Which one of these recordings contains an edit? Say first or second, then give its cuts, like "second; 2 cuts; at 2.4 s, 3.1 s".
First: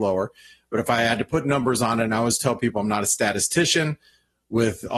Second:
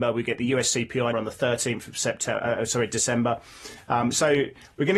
second; 1 cut; at 1.1 s